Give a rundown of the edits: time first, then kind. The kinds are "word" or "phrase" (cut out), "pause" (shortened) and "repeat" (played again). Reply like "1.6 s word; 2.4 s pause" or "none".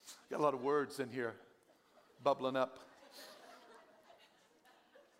none